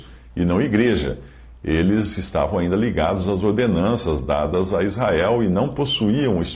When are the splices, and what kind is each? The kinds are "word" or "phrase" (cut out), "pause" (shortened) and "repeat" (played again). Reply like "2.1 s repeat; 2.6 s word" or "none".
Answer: none